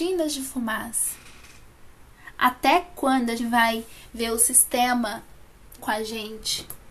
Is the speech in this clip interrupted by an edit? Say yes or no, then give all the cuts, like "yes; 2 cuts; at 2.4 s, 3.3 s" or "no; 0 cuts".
yes; 2 cuts; at 3.4 s, 5.8 s